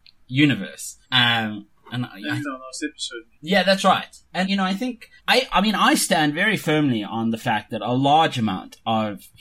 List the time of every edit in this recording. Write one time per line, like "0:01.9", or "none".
0:01.0
0:02.4
0:03.3
0:04.4
0:05.2